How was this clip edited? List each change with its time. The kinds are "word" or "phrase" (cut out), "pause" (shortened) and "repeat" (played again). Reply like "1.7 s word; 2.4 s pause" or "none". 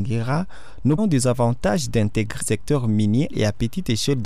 1.0 s word; 2.4 s word; 3.3 s word